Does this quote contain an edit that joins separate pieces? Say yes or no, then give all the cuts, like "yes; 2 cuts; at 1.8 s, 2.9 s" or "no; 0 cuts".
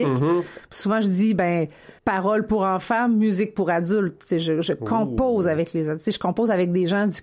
yes; 1 cut; at 2.0 s